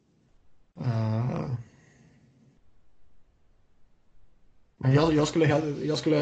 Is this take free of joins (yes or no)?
yes